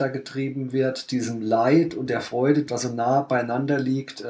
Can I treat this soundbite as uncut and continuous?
no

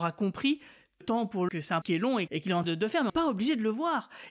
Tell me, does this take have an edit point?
yes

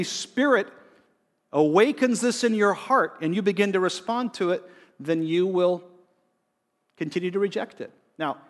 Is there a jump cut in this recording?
no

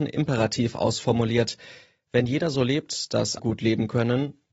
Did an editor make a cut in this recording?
yes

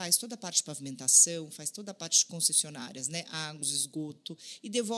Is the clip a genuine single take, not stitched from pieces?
no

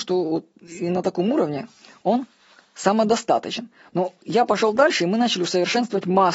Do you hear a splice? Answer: no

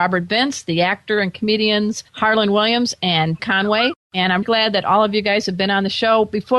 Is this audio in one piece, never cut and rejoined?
no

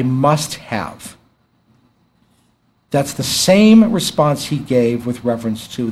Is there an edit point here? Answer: no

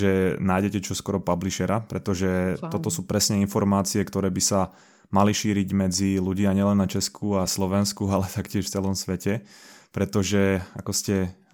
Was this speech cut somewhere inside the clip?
no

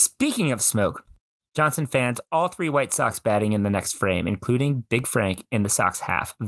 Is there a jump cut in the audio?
no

